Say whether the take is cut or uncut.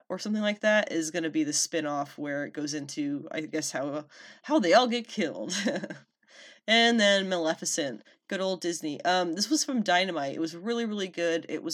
uncut